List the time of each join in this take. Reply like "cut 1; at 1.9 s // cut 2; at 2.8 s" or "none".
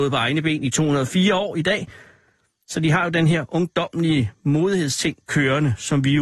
none

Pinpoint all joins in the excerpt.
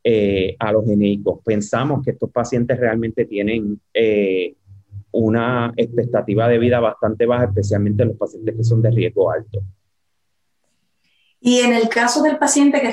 none

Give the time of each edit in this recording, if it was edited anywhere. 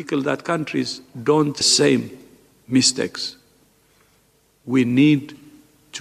cut 1; at 1.6 s

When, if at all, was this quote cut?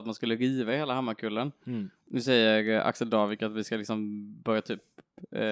none

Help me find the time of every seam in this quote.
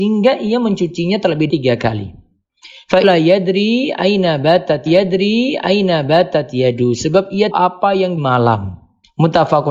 cut 1; at 1.5 s // cut 2; at 3.0 s // cut 3; at 4.9 s // cut 4; at 7.5 s // cut 5; at 8.2 s

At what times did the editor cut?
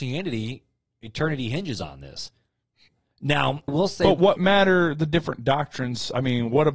cut 1; at 3.7 s // cut 2; at 4.4 s

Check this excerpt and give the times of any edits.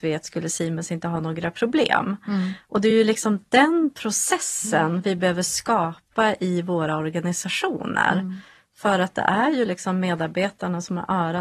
none

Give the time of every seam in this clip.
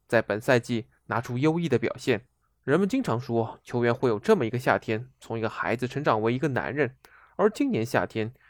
cut 1; at 2.4 s

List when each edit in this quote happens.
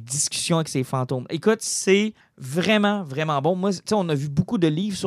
cut 1; at 2.2 s

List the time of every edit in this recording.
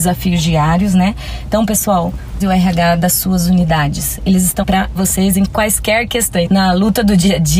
cut 1; at 2.4 s // cut 2; at 4.6 s // cut 3; at 5.0 s // cut 4; at 5.5 s // cut 5; at 6.5 s

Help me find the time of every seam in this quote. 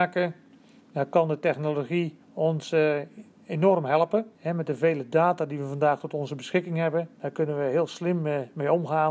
cut 1; at 2.2 s // cut 2; at 4.3 s // cut 3; at 7.1 s

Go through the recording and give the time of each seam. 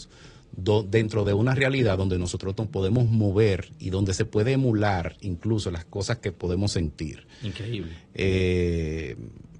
none

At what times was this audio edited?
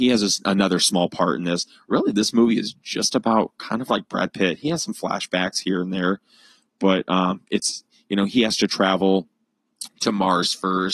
none

